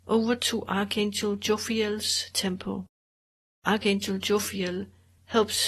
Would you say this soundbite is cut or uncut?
uncut